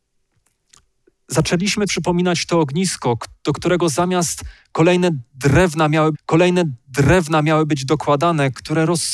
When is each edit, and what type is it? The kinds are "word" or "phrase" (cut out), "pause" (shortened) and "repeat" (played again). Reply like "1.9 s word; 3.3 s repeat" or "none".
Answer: 1.9 s phrase; 6.1 s repeat